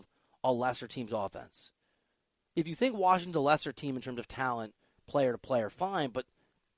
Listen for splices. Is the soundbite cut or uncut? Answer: uncut